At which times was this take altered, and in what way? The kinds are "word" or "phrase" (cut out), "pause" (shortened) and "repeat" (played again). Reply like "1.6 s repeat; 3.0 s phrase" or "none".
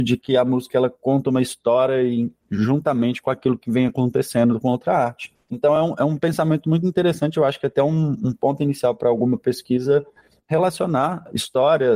none